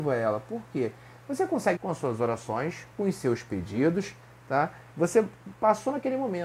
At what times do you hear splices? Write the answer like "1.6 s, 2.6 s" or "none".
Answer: 1.8 s, 2.9 s, 4.9 s